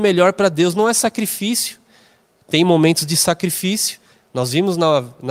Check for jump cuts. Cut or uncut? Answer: uncut